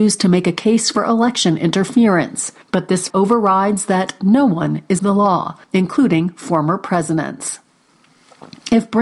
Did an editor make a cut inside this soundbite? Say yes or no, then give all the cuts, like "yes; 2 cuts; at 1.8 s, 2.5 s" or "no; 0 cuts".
yes; 4 cuts; at 2.6 s, 3.1 s, 5.0 s, 5.6 s